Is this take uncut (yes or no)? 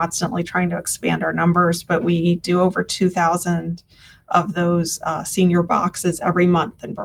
yes